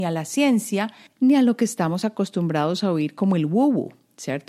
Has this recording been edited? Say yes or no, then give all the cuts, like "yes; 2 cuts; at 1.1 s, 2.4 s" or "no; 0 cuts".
no; 0 cuts